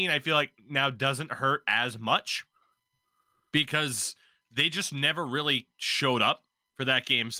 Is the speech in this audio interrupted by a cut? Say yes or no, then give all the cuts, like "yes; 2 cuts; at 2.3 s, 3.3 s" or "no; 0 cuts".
no; 0 cuts